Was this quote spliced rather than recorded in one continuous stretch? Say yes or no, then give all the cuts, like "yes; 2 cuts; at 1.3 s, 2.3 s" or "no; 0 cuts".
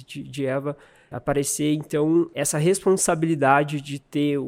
yes; 2 cuts; at 1.1 s, 2.3 s